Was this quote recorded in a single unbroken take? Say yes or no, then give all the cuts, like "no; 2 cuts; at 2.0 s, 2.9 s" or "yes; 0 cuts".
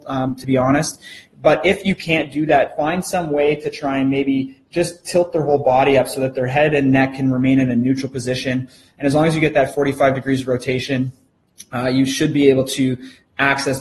yes; 0 cuts